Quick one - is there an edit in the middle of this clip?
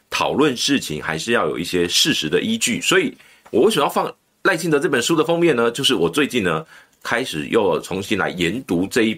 no; 0 cuts

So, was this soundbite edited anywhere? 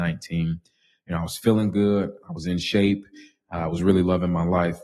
no; 0 cuts

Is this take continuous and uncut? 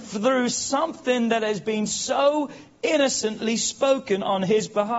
yes; 0 cuts

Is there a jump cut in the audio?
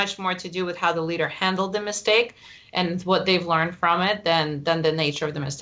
no; 0 cuts

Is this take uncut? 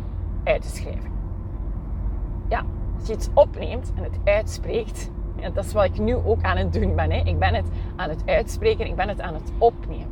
yes; 0 cuts

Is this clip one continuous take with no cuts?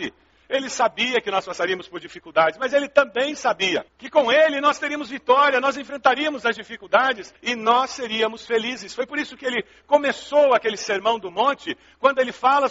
no; 1 cut; at 7.4 s

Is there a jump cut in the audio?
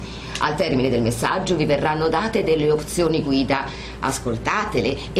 no; 0 cuts

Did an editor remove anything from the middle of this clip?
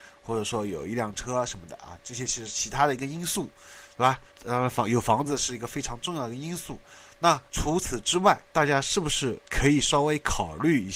yes; 4 cuts; at 4.3 s, 7.5 s, 8.5 s, 9.4 s

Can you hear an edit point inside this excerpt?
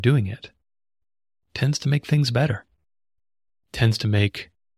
no; 0 cuts

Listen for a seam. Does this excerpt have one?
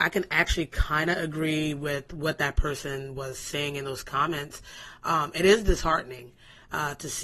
no; 0 cuts

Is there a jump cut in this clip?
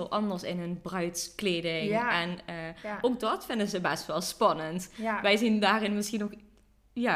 no; 0 cuts

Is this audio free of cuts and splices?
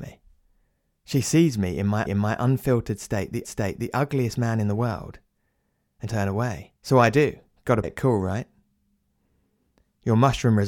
no; 5 cuts; at 2.1 s, 3.4 s, 6.1 s, 6.8 s, 7.8 s

